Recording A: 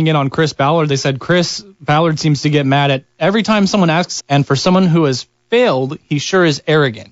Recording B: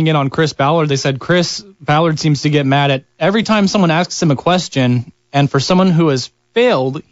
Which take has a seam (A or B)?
A